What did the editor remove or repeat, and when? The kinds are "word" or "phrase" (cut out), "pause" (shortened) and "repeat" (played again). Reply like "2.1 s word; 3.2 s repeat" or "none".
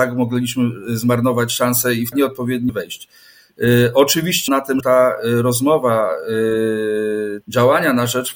2.1 s word; 2.7 s word; 4.5 s word; 4.8 s word; 7.4 s word

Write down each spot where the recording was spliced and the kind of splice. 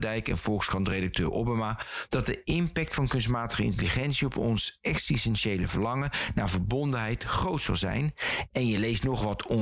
none

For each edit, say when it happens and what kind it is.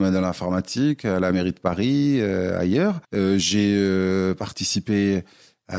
3.0 s pause

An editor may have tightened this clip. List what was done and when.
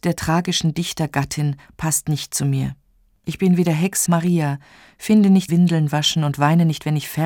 4.1 s word; 5.5 s phrase

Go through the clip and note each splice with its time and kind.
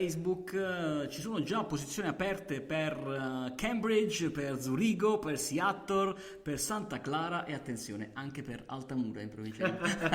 none

